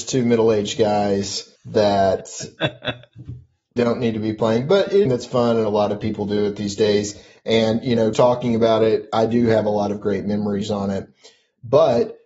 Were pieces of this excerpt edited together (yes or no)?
yes